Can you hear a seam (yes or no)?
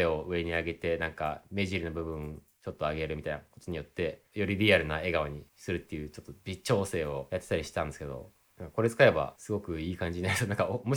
yes